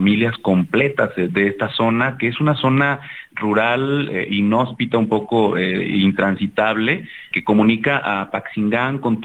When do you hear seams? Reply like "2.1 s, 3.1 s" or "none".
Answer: 7.3 s